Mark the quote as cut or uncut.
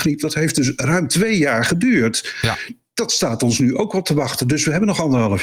uncut